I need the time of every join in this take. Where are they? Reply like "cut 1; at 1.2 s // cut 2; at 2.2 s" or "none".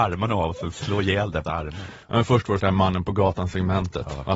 cut 1; at 1.4 s // cut 2; at 2.0 s // cut 3; at 2.6 s